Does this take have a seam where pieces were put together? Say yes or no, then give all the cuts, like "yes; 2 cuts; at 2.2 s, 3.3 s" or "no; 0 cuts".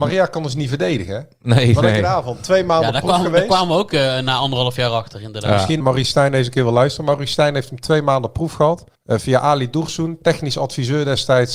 yes; 2 cuts; at 5.8 s, 8.9 s